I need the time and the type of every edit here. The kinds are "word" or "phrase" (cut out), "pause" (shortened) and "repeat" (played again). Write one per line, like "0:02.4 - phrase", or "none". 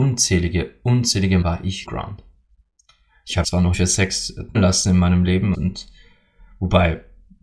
0:01.4 - word
0:01.9 - word
0:03.4 - word
0:03.7 - word
0:04.5 - word
0:05.5 - word